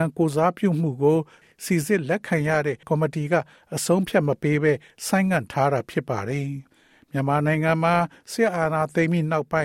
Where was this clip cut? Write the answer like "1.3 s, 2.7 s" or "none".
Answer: 2.8 s